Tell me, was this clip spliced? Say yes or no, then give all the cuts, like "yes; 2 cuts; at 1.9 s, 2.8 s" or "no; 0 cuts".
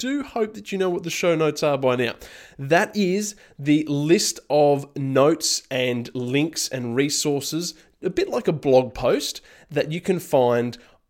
no; 0 cuts